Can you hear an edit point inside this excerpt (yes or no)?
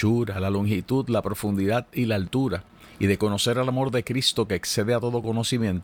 no